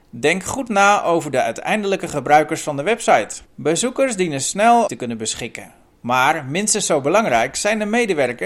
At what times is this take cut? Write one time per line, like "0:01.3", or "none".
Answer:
0:03.5
0:04.9